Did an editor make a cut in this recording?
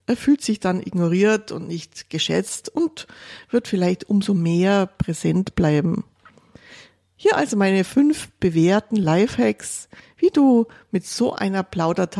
no; 0 cuts

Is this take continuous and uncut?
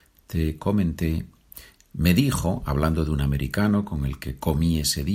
yes; 0 cuts

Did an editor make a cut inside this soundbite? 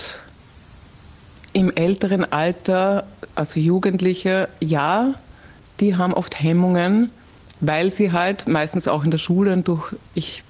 no; 0 cuts

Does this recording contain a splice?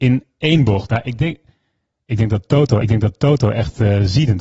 yes; 1 cut; at 2.8 s

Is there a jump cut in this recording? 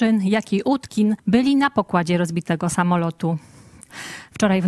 yes; 1 cut; at 1.2 s

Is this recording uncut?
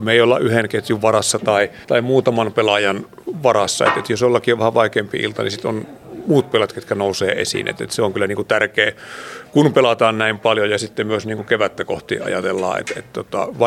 no; 1 cut; at 1.8 s

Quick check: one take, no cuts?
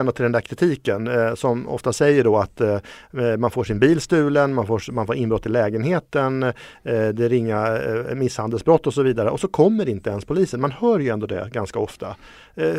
yes; 0 cuts

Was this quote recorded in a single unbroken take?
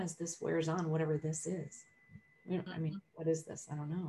yes; 0 cuts

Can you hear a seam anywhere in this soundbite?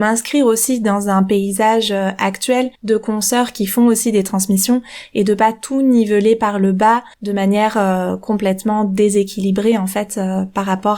yes; 2 cuts; at 2.7 s, 7.1 s

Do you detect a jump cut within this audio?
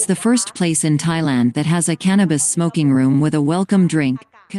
no; 0 cuts

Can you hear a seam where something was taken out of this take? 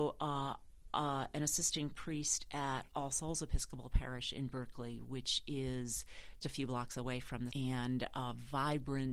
yes; 2 cuts; at 6.4 s, 7.5 s

